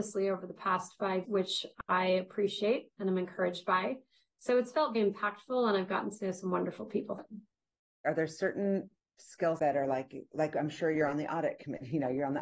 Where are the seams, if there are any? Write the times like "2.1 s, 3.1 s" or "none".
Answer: 1.2 s, 4.9 s, 7.2 s, 9.6 s